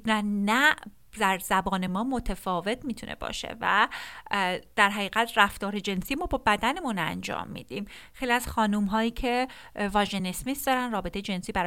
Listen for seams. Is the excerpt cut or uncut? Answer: uncut